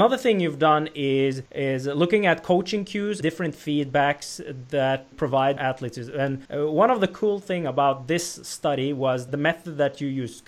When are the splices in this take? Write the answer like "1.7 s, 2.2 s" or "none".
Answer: 1.5 s, 3.2 s, 5.1 s, 5.6 s, 6.5 s, 9.3 s